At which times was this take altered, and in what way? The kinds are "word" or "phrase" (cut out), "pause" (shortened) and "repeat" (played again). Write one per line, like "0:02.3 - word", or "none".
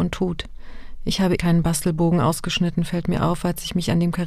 0:01.4 - word